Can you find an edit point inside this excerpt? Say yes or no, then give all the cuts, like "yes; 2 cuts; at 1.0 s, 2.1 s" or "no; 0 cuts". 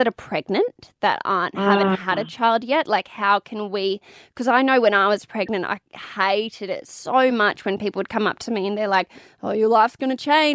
no; 0 cuts